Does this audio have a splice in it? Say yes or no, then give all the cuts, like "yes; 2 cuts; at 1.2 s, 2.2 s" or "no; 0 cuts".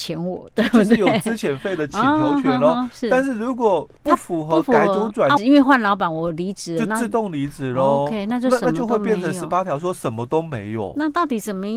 yes; 2 cuts; at 4.0 s, 5.4 s